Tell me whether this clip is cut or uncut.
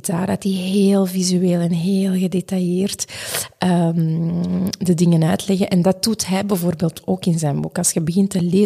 uncut